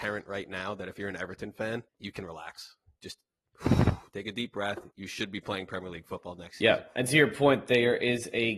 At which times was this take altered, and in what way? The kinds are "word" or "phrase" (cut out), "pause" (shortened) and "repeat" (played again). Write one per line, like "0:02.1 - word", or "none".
0:01.9 - pause
0:04.9 - pause